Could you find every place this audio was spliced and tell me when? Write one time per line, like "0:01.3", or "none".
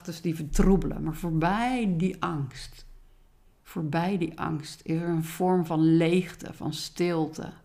none